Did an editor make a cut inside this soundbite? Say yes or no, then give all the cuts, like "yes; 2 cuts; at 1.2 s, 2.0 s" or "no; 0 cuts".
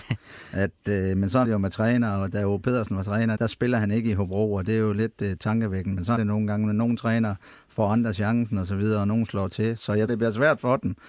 yes; 4 cuts; at 1.4 s, 3.4 s, 6.2 s, 10.1 s